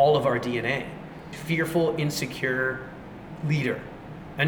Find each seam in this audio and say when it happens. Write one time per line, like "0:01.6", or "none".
0:01.3

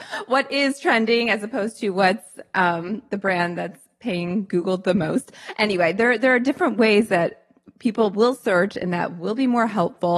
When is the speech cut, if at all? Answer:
none

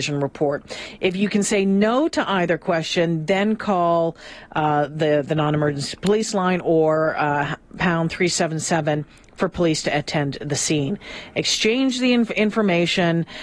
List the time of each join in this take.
none

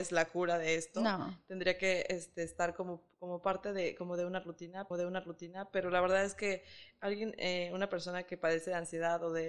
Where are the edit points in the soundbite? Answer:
0:04.9

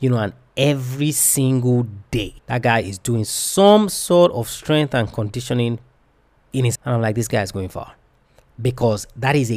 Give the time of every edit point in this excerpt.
0:02.4
0:06.7

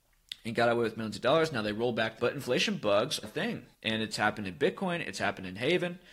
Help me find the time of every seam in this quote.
0:02.2
0:03.2
0:03.7

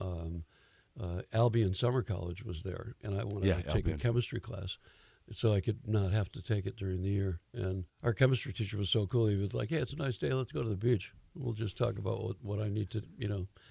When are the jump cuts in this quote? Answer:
0:07.9

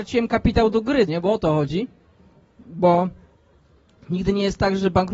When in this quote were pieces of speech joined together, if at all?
0:01.1

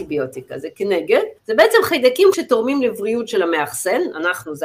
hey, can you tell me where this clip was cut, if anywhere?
0:01.4
0:02.3

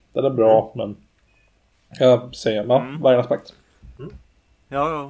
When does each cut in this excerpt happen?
none

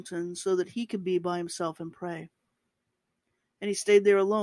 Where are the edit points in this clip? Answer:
none

